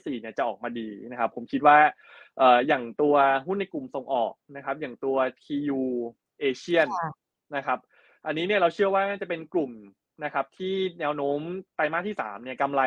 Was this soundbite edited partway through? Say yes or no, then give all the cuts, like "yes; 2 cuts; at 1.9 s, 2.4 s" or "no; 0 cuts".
no; 0 cuts